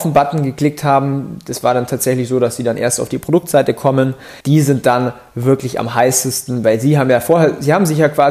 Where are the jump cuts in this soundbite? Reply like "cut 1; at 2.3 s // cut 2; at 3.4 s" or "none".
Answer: cut 1; at 4.4 s